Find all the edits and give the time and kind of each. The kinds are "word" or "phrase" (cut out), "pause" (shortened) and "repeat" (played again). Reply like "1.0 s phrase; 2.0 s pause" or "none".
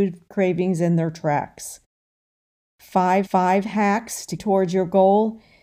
3.2 s repeat; 4.4 s phrase